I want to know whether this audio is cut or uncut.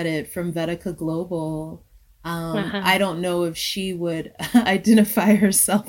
uncut